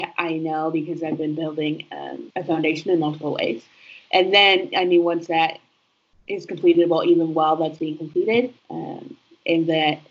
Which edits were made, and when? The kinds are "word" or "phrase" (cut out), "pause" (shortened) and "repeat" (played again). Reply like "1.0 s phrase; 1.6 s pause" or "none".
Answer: 2.3 s pause; 8.6 s pause